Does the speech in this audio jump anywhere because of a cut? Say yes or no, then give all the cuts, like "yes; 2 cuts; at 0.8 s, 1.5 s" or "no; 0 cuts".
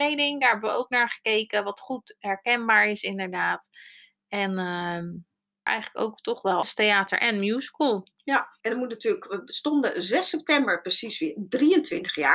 yes; 3 cuts; at 5.7 s, 6.6 s, 8.6 s